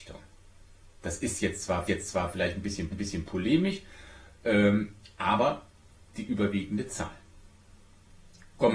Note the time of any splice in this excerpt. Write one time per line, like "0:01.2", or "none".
0:01.0
0:01.9
0:02.9
0:06.1